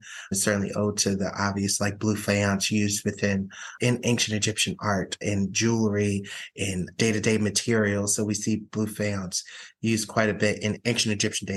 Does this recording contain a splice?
no; 0 cuts

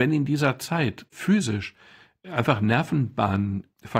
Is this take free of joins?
no; 1 cut; at 1.1 s

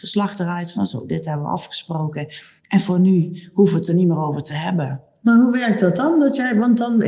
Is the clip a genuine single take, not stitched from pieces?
no; 1 cut; at 2.6 s

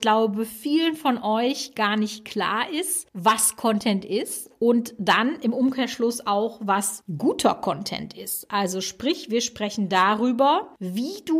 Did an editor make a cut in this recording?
no; 0 cuts

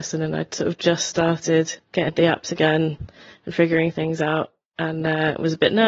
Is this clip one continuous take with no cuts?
no; 1 cut; at 2.1 s

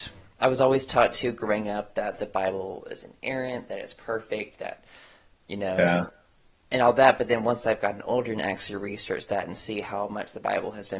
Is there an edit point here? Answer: no; 0 cuts

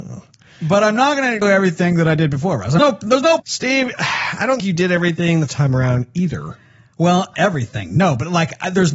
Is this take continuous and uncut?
no; 6 cuts; at 1.4 s, 2.8 s, 3.4 s, 4.6 s, 5.5 s, 7.3 s

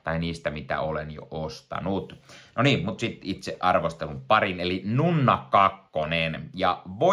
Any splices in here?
no; 0 cuts

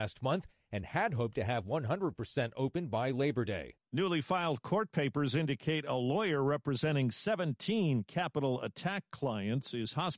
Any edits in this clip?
no; 0 cuts

